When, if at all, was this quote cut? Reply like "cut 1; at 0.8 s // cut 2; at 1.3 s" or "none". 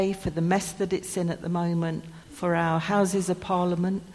cut 1; at 2.2 s